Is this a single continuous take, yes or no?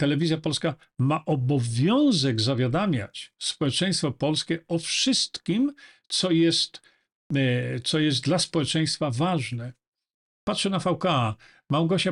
yes